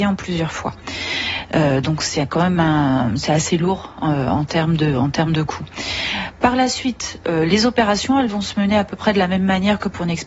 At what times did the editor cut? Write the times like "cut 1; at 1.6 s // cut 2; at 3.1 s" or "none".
none

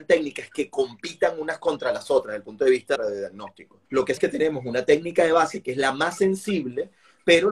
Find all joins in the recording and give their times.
cut 1; at 3.0 s // cut 2; at 3.9 s // cut 3; at 4.2 s

